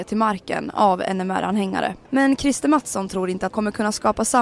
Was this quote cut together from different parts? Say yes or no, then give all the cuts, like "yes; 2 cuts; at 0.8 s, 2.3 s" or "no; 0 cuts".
yes; 2 cuts; at 2.0 s, 3.5 s